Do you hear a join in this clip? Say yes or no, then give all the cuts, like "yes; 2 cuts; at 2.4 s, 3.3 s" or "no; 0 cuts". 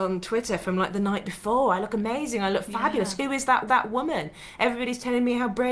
yes; 1 cut; at 3.7 s